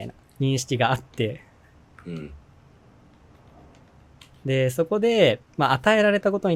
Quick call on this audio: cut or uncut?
uncut